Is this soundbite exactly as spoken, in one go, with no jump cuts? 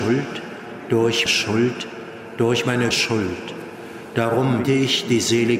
no; 3 cuts; at 1.3 s, 2.9 s, 4.6 s

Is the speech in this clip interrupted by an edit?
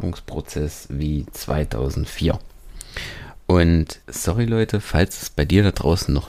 yes; 1 cut; at 4.0 s

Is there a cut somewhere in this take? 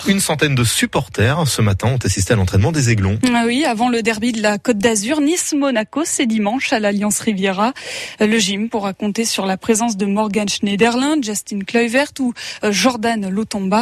no; 0 cuts

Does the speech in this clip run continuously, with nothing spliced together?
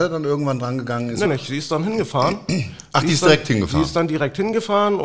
no; 1 cut; at 1.2 s

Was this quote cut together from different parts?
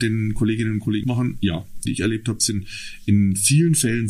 yes; 2 cuts; at 1.0 s, 1.9 s

